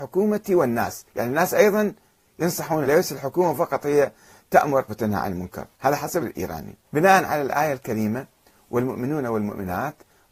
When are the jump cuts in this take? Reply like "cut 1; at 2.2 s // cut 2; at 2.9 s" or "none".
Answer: cut 1; at 1.1 s // cut 2; at 2.8 s // cut 3; at 4.9 s // cut 4; at 5.7 s // cut 5; at 6.2 s // cut 6; at 6.8 s